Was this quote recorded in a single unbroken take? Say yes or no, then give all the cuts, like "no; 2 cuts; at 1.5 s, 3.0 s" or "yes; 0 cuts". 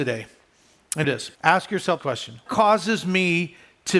no; 4 cuts; at 1.0 s, 1.3 s, 2.0 s, 2.5 s